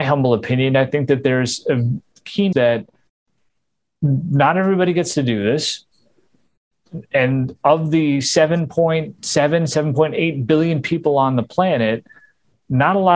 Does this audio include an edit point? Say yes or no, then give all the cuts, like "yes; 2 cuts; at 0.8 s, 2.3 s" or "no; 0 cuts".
yes; 2 cuts; at 2.5 s, 9.2 s